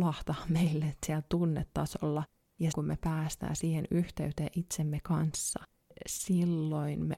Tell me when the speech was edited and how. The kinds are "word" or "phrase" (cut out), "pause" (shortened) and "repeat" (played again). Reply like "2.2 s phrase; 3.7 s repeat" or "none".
2.7 s word